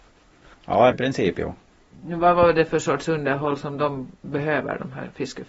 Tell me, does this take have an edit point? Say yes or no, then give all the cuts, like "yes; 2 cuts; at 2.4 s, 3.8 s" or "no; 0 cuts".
yes; 1 cut; at 0.9 s